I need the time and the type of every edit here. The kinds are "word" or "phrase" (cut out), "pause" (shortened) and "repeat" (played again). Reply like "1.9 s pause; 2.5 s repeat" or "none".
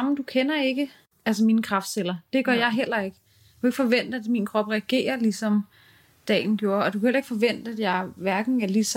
none